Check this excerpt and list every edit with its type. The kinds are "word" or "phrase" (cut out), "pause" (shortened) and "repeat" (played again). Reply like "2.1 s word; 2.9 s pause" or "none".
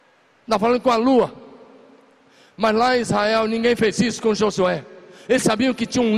none